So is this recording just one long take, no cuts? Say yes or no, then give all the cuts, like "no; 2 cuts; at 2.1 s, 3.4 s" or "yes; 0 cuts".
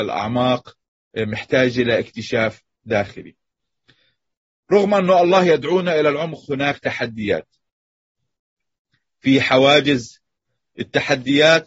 yes; 0 cuts